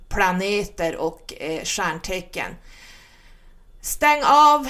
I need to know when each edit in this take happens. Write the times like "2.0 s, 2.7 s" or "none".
none